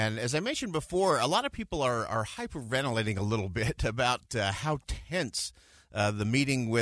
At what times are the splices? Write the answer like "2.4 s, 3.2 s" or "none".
none